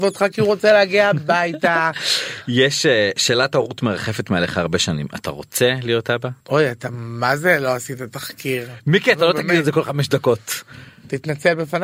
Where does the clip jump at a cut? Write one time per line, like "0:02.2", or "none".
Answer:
0:06.4